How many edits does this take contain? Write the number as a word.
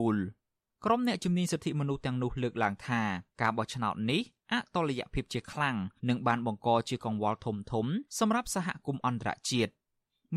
three